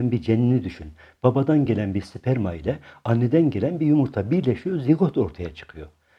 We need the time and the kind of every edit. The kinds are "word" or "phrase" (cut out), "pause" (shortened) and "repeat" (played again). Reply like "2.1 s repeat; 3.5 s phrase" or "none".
none